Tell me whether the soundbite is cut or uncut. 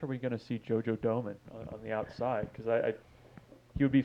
uncut